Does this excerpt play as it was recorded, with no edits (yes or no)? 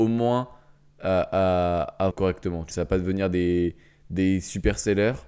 no